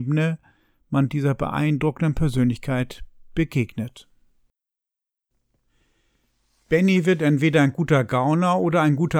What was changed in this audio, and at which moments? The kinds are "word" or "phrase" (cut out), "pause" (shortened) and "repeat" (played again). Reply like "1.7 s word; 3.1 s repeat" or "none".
none